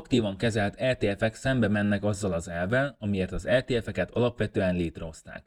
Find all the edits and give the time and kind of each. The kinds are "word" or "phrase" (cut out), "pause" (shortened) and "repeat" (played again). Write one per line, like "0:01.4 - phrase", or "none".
none